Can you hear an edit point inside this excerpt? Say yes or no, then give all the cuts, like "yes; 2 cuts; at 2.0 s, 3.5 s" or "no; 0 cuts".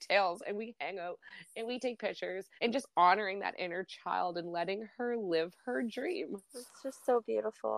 yes; 1 cut; at 2.6 s